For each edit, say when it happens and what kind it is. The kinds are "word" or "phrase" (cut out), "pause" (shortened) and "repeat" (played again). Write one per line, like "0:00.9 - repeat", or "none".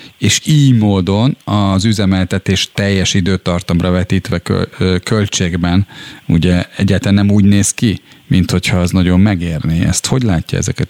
0:01.4 - pause